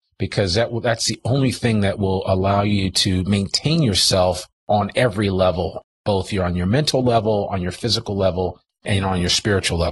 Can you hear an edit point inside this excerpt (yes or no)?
no